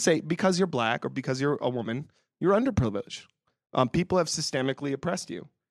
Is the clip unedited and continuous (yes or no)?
yes